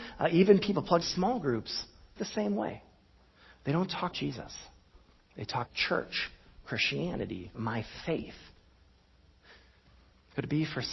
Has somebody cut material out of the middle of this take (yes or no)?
yes